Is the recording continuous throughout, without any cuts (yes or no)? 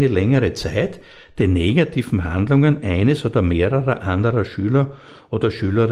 yes